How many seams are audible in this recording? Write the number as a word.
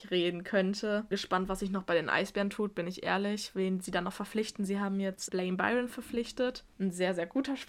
two